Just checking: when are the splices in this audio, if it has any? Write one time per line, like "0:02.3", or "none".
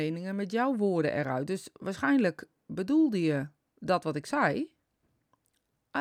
none